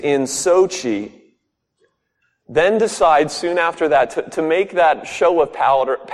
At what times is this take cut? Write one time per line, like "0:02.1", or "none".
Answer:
none